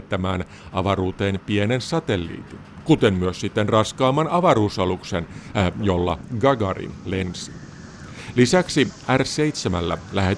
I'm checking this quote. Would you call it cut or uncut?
uncut